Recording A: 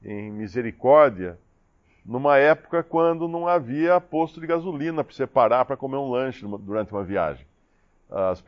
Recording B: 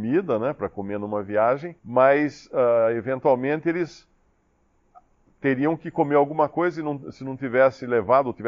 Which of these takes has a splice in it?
B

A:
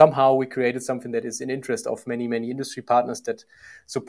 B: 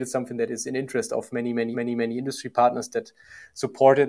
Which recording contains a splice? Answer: B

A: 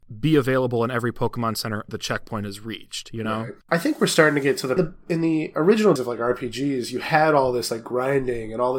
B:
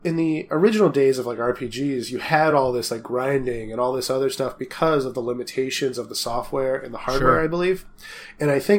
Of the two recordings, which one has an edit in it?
A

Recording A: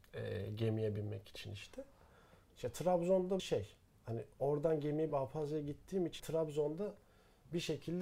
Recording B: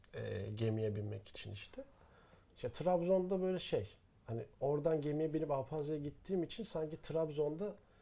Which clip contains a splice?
A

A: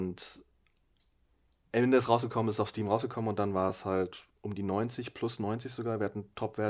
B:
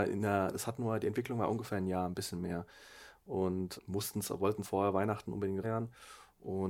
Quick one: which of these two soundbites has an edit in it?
B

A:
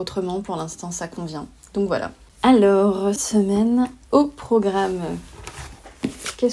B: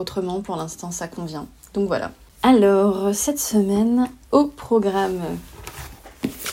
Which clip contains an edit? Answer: A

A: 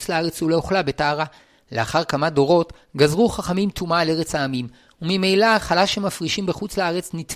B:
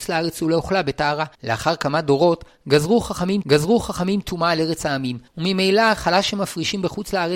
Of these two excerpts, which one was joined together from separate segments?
B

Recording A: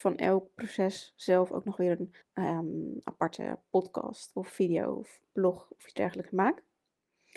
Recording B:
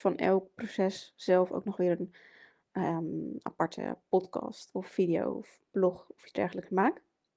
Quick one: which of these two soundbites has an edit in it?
A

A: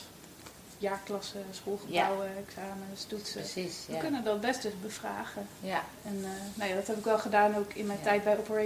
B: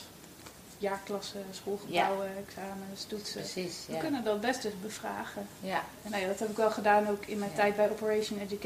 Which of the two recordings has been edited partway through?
B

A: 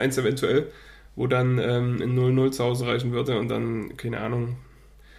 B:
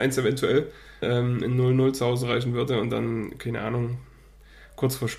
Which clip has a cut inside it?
B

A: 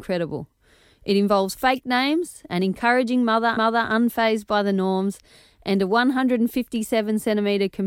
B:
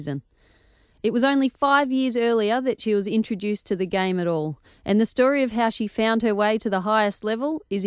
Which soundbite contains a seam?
A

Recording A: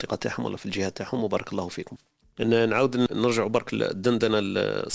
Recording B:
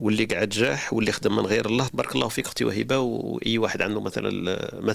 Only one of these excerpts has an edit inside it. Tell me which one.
B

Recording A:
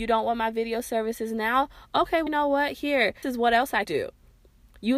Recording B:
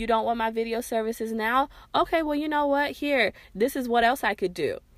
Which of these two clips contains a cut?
A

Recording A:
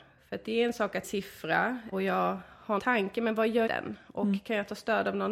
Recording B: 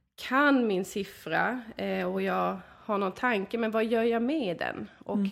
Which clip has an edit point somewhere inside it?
A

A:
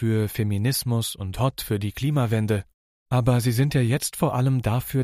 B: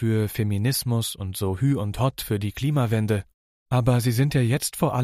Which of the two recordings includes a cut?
A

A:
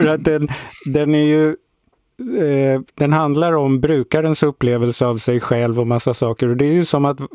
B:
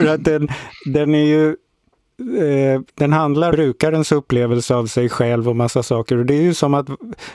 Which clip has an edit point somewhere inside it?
B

